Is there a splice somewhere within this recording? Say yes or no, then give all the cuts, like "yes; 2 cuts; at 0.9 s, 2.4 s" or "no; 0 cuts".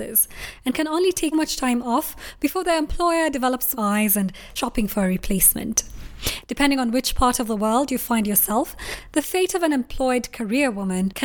yes; 3 cuts; at 1.3 s, 3.7 s, 4.6 s